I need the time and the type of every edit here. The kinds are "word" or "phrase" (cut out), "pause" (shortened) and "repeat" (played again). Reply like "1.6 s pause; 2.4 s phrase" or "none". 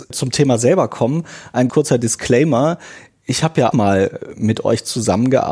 1.7 s word; 3.7 s word